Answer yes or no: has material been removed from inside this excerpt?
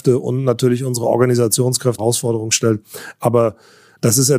yes